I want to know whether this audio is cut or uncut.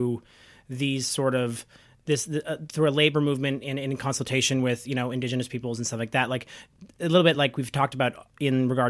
uncut